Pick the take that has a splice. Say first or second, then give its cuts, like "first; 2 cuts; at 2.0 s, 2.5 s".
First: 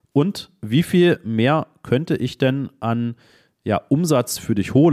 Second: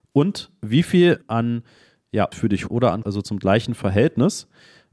second; 4 cuts; at 1.2 s, 2.3 s, 2.7 s, 3.0 s